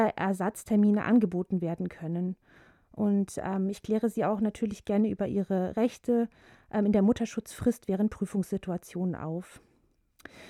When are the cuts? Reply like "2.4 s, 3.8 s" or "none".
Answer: none